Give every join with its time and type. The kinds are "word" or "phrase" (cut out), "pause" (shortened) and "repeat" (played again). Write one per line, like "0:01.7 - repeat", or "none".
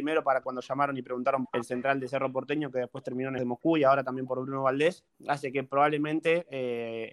0:01.4 - phrase
0:03.4 - word
0:05.1 - pause